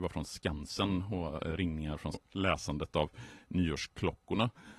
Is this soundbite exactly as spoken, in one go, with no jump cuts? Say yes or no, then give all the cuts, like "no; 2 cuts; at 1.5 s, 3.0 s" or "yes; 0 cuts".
no; 1 cut; at 2.1 s